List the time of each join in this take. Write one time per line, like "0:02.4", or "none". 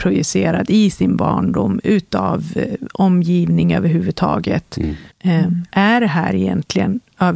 0:05.1